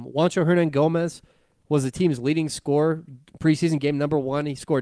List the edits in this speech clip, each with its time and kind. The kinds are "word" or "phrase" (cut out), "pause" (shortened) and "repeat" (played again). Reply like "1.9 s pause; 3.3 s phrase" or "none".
none